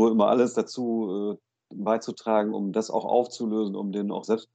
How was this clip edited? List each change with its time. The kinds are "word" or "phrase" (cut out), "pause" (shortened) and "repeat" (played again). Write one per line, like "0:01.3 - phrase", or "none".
none